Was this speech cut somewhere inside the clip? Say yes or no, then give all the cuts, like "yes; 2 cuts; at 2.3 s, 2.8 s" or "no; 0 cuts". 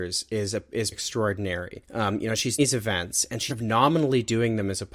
yes; 3 cuts; at 0.9 s, 2.6 s, 3.5 s